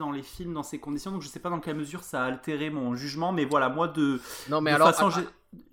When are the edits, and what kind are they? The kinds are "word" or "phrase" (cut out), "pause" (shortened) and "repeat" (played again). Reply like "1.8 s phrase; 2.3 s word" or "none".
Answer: none